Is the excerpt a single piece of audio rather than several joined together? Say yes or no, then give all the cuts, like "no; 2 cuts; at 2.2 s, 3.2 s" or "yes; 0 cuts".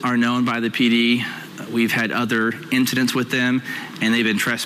yes; 0 cuts